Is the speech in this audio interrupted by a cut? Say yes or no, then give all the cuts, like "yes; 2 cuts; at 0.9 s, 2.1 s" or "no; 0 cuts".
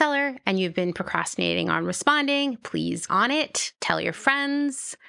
yes; 2 cuts; at 3.1 s, 3.8 s